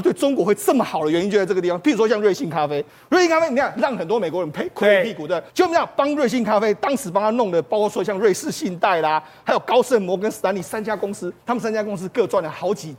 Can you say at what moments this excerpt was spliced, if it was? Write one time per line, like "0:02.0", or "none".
0:02.9
0:05.5
0:11.4